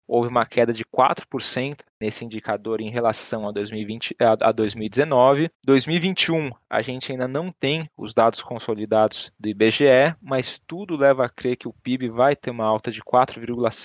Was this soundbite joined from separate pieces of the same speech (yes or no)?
yes